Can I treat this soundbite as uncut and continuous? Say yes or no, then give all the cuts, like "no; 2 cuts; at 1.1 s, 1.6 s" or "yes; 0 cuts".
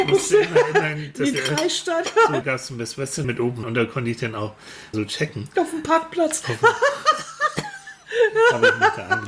no; 5 cuts; at 1.3 s, 2.4 s, 3.2 s, 3.6 s, 4.9 s